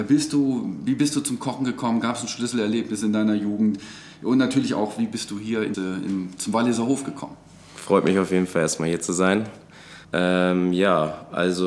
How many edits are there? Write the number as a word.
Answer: two